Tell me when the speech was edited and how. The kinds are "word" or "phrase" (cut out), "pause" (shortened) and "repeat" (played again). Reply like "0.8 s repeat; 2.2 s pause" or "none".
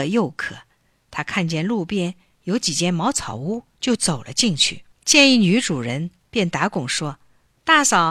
4.9 s pause